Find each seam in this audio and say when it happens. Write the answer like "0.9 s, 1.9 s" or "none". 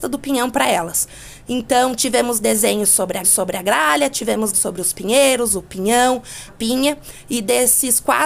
3.2 s, 4.5 s, 6.5 s